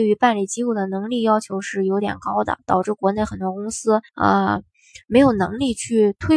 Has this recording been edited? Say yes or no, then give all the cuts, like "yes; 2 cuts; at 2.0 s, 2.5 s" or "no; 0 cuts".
yes; 1 cut; at 4.1 s